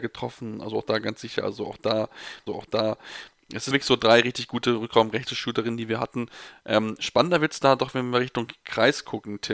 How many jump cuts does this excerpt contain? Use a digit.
2